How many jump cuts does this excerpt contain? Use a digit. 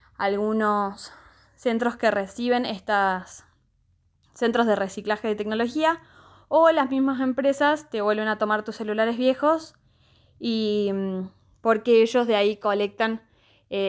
0